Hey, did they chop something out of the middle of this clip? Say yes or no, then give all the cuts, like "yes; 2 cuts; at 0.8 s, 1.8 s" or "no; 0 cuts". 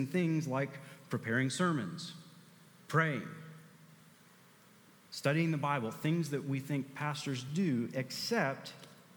no; 0 cuts